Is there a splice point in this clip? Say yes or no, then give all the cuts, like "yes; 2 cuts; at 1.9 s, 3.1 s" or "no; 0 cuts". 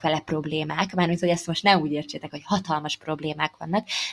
no; 0 cuts